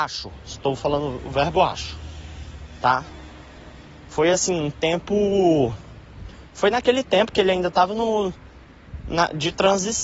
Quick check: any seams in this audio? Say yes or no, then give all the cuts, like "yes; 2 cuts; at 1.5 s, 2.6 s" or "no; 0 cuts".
no; 0 cuts